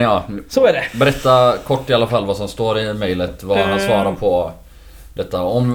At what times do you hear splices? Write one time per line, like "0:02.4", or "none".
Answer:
none